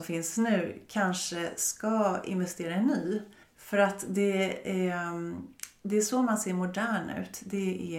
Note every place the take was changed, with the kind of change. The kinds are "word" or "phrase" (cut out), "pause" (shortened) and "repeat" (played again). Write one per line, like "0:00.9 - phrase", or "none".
0:03.4 - pause